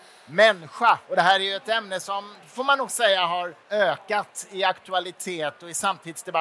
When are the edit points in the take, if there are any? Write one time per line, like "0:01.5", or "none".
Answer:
0:01.0
0:02.4
0:03.6